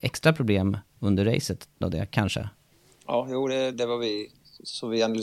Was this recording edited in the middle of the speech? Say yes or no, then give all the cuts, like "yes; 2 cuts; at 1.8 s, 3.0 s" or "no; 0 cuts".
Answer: yes; 3 cuts; at 1.8 s, 2.7 s, 3.7 s